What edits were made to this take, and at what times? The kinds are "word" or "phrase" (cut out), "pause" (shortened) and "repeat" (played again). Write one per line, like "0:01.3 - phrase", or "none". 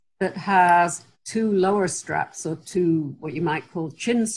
none